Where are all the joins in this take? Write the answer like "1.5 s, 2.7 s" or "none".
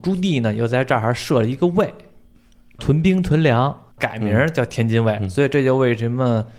3.9 s